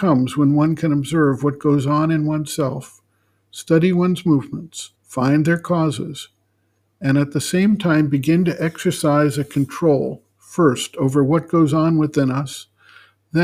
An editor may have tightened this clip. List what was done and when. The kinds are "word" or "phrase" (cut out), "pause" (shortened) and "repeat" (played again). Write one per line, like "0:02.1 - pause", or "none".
0:05.0 - pause

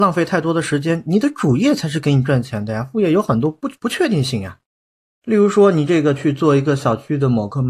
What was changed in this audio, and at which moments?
0:03.8 - pause

